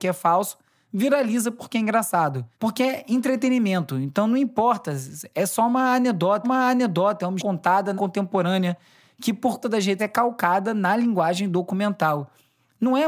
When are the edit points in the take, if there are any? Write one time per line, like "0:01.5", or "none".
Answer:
0:02.5
0:06.4
0:07.4
0:08.0
0:09.6
0:10.0